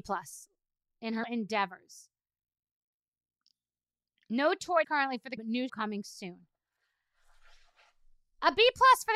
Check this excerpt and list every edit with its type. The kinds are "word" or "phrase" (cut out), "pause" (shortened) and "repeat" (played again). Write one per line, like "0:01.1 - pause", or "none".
0:01.2 - word
0:04.8 - word
0:05.4 - word
0:05.7 - word